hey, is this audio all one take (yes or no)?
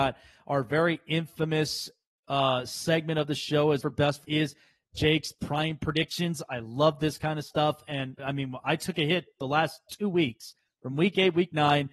no